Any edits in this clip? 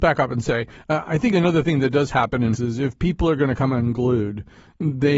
yes; 1 cut; at 2.5 s

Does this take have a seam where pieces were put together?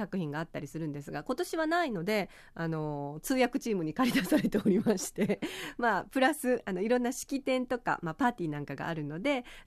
no; 0 cuts

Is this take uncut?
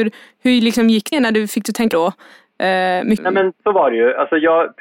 no; 3 cuts; at 1.1 s, 1.9 s, 3.2 s

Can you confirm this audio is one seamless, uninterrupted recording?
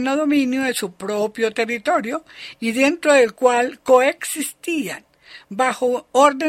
yes; 0 cuts

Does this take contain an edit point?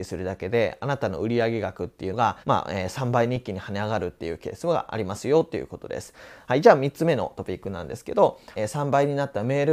yes; 2 cuts; at 2.4 s, 8.5 s

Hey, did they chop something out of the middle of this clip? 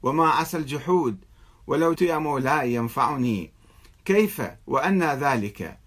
yes; 2 cuts; at 2.0 s, 4.6 s

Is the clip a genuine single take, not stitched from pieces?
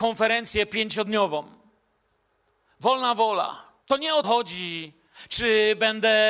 no; 2 cuts; at 3.8 s, 4.2 s

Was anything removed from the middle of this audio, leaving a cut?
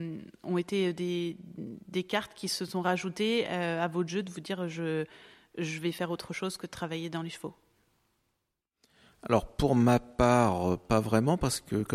no; 0 cuts

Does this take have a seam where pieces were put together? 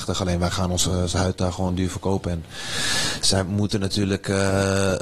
no; 0 cuts

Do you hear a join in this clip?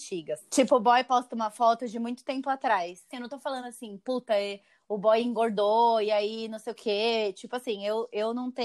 no; 0 cuts

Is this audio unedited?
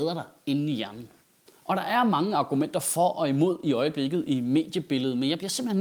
yes; 0 cuts

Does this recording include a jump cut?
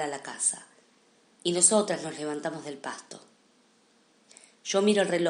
no; 0 cuts

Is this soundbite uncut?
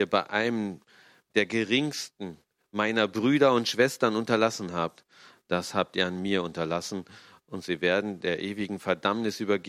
yes; 0 cuts

